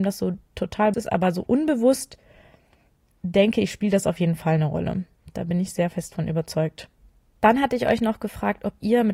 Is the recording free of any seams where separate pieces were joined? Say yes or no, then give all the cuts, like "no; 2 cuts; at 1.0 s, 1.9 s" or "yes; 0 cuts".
no; 1 cut; at 0.9 s